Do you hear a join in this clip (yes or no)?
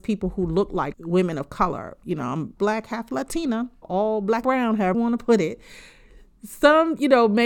yes